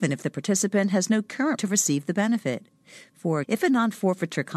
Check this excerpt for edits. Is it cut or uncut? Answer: cut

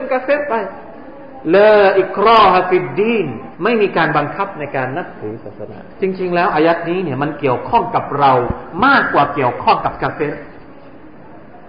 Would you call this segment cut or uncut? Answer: cut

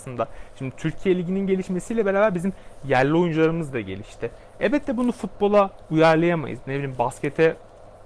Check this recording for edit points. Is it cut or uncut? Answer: uncut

